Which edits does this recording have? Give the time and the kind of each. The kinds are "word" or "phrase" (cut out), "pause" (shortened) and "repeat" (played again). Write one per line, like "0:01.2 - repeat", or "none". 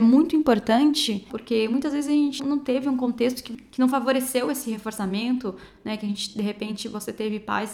0:02.4 - word